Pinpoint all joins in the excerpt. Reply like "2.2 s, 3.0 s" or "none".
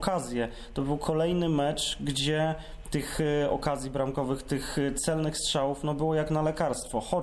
none